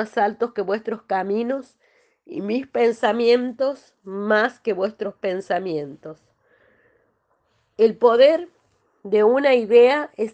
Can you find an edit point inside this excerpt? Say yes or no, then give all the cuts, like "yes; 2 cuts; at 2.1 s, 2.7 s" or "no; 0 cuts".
no; 0 cuts